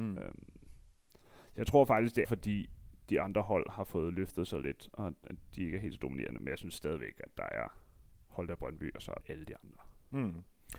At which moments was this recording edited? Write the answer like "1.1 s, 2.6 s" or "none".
2.2 s, 9.2 s